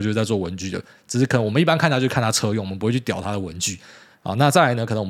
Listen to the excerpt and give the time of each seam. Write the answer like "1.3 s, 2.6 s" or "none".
none